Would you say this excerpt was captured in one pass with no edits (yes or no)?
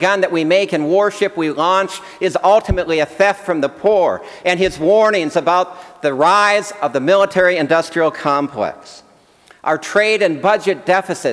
yes